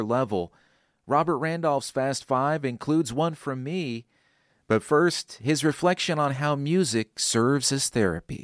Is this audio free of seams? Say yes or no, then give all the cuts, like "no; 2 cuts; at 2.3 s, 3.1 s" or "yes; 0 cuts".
yes; 0 cuts